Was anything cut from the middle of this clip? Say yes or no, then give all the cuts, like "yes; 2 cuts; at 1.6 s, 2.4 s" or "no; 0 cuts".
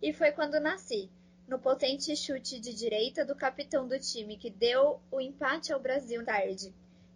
yes; 1 cut; at 6.2 s